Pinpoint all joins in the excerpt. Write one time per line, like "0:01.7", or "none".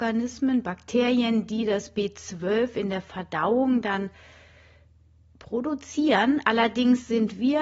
none